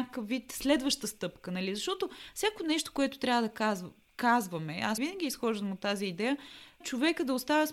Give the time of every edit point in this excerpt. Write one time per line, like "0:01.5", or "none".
0:05.0
0:06.8